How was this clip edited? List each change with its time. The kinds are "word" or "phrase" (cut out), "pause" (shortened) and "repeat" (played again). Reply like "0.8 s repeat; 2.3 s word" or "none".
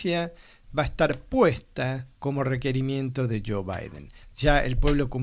2.1 s pause